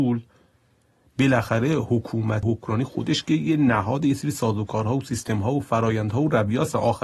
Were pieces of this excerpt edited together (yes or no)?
yes